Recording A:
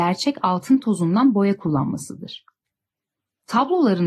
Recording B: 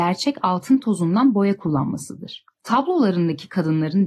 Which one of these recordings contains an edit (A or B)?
B